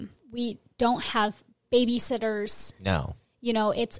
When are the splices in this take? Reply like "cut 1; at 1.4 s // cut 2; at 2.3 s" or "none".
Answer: none